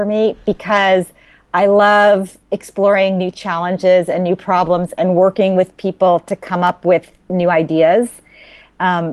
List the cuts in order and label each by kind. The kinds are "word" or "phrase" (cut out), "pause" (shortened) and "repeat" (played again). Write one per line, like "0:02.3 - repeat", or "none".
none